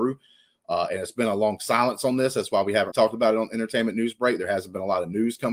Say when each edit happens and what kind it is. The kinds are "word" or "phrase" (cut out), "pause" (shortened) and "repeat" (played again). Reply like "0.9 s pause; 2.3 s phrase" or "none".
2.9 s word